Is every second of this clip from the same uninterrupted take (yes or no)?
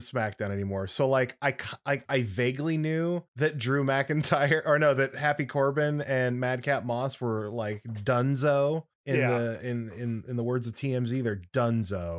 no